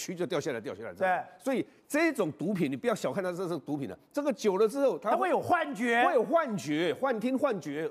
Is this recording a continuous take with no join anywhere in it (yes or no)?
yes